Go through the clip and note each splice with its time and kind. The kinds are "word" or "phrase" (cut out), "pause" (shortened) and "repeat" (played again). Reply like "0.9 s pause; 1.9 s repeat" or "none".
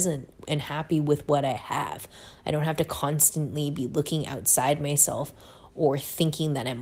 none